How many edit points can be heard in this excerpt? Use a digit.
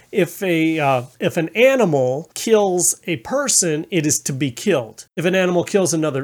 3